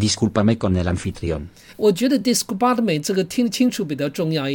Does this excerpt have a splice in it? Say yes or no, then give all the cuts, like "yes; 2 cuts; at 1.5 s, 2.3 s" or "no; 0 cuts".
no; 0 cuts